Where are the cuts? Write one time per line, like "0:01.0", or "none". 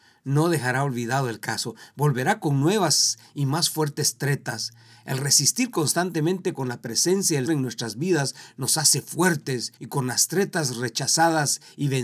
0:07.5
0:09.8